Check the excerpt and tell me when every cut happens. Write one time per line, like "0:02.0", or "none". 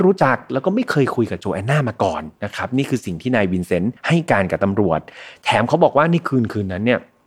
0:02.4
0:04.0